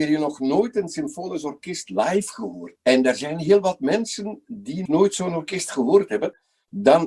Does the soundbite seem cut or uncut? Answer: cut